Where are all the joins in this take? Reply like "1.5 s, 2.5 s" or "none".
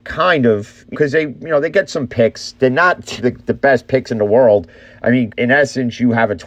0.9 s, 3.2 s, 5.3 s